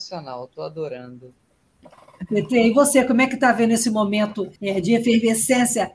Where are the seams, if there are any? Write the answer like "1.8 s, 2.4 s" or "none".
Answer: 4.6 s